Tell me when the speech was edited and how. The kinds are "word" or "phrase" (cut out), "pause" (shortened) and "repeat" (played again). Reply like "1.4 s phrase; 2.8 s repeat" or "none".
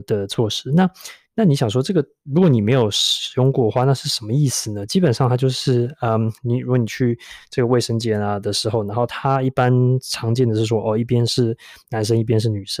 6.4 s pause